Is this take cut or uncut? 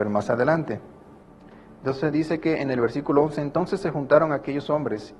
cut